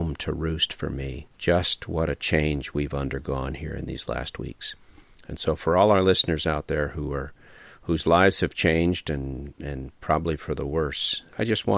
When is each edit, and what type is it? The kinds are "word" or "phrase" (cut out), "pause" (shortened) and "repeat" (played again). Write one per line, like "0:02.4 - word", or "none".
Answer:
none